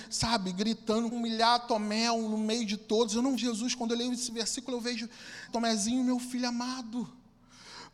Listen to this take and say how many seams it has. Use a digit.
3